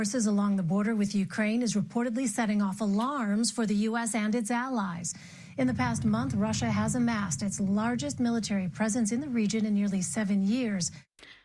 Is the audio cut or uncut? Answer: uncut